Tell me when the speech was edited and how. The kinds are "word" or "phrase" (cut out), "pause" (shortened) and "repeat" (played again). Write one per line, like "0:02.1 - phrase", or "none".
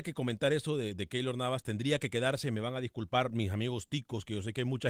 none